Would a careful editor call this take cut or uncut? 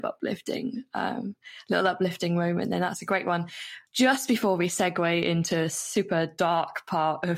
cut